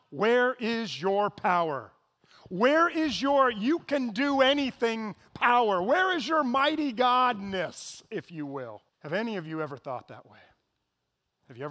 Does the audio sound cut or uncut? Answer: cut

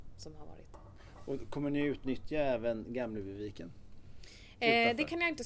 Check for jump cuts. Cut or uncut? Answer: uncut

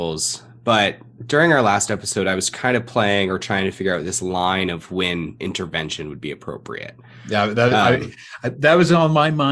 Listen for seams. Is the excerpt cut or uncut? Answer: uncut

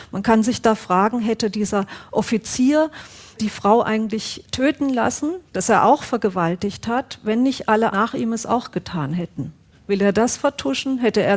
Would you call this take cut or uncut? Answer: cut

